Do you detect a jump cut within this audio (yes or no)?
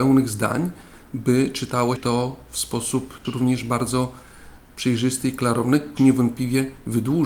yes